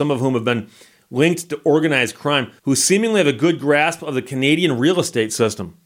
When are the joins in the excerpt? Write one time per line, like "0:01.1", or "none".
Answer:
0:02.6